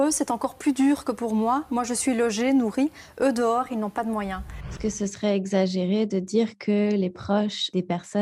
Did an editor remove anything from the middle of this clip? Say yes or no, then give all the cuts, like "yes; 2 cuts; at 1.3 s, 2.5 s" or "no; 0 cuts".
no; 0 cuts